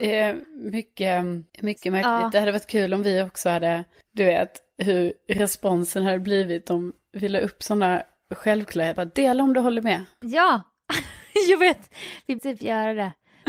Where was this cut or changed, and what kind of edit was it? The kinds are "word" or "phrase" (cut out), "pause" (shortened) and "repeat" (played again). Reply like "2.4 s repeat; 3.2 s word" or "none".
1.5 s pause; 9.0 s word; 12.4 s word